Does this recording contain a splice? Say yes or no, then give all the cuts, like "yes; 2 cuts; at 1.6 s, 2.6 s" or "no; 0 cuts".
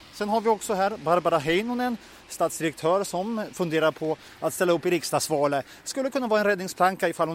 no; 0 cuts